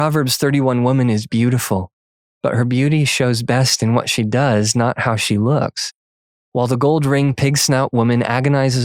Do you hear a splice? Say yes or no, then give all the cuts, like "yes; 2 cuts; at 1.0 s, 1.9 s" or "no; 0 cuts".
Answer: no; 0 cuts